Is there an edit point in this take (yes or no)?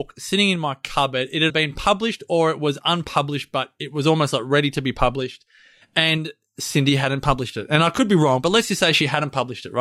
yes